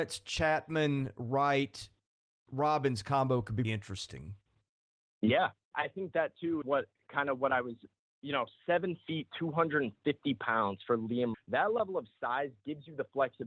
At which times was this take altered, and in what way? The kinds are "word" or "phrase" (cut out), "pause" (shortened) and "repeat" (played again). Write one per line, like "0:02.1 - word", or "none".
0:03.6 - word
0:05.7 - word
0:06.6 - word
0:11.3 - word